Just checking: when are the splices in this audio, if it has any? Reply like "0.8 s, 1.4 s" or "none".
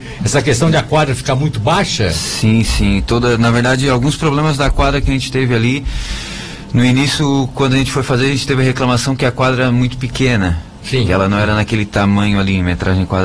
none